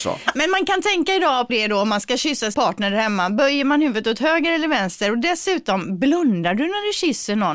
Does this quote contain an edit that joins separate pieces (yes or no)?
yes